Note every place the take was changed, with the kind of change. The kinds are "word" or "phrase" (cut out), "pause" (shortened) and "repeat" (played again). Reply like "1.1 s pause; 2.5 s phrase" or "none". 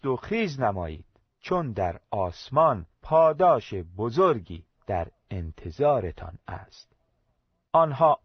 1.3 s pause; 2.9 s pause; 4.7 s pause